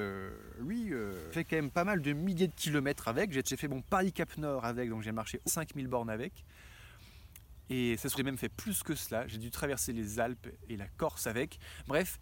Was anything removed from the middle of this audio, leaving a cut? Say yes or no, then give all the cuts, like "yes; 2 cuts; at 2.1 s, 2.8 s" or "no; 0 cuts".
yes; 5 cuts; at 1.3 s, 3.4 s, 5.5 s, 8.2 s, 10.7 s